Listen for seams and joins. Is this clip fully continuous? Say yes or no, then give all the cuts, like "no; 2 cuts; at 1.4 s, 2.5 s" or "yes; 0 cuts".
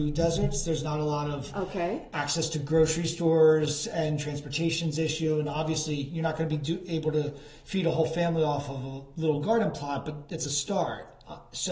yes; 0 cuts